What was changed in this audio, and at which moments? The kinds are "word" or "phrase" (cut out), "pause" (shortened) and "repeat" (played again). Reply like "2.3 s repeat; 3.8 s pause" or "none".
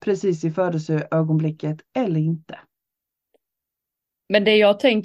none